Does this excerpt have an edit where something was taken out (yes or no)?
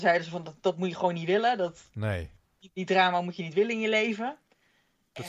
no